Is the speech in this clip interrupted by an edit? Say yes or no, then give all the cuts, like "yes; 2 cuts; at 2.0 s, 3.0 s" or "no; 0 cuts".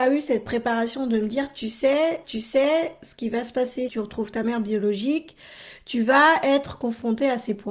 yes; 2 cuts; at 2.2 s, 3.9 s